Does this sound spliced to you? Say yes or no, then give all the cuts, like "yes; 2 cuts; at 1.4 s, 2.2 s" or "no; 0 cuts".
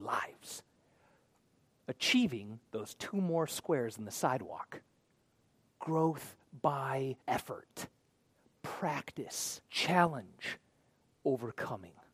yes; 3 cuts; at 5.5 s, 7.2 s, 9.7 s